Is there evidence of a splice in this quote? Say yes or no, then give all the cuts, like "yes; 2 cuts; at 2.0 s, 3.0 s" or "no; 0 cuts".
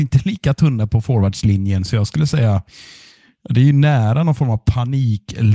no; 0 cuts